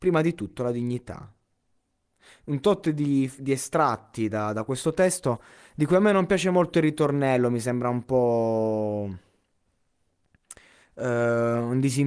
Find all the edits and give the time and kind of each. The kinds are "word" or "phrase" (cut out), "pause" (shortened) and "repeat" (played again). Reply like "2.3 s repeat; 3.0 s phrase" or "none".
none